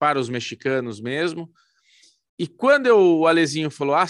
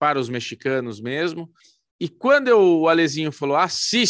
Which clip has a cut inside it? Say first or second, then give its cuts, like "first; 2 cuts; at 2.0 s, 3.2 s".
second; 1 cut; at 1.6 s